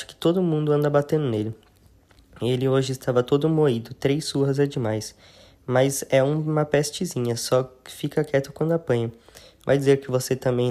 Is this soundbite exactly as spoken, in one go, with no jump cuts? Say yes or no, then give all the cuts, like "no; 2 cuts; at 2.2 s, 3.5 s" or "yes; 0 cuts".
yes; 0 cuts